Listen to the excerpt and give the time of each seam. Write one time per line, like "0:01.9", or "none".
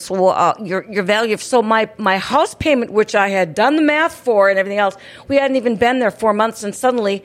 none